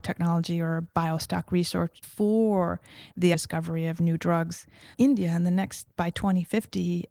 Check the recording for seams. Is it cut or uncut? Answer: cut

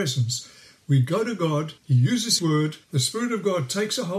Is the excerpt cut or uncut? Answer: cut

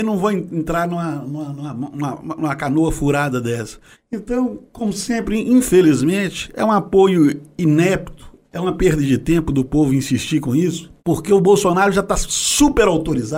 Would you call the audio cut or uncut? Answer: cut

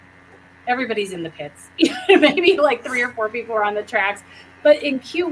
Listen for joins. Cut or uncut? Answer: uncut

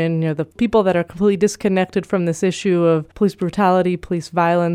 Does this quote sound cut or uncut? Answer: cut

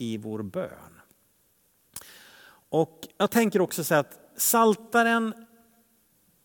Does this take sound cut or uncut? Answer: cut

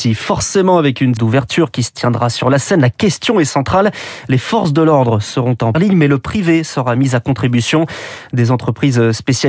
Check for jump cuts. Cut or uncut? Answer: cut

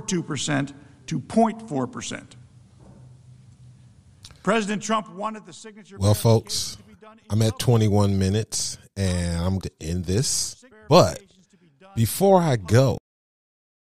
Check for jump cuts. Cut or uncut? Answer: cut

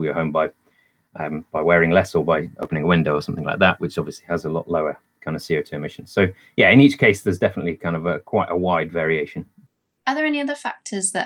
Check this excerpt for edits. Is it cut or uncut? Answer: uncut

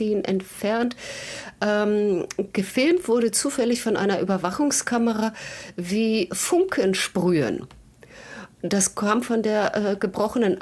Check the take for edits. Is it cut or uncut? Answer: uncut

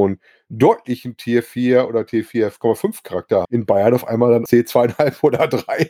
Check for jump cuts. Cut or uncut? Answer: cut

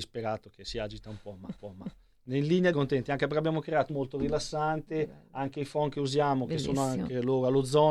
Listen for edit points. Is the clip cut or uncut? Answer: cut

